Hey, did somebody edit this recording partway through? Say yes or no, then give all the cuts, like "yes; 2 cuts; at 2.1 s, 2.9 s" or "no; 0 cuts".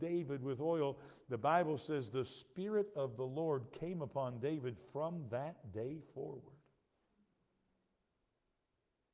no; 0 cuts